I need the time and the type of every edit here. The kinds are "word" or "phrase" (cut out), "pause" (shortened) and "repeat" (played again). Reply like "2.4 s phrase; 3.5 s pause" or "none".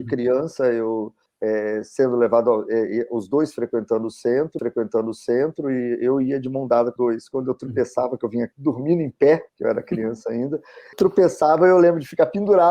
1.3 s pause; 4.6 s repeat; 7.0 s word; 8.5 s pause; 9.5 s pause; 10.9 s word